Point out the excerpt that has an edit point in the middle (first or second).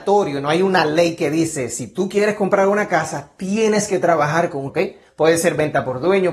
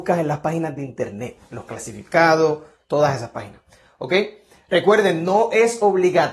first